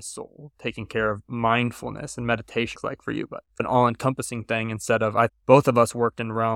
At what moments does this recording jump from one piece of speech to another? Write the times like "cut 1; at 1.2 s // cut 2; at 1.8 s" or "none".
cut 1; at 2.8 s // cut 2; at 3.5 s // cut 3; at 5.3 s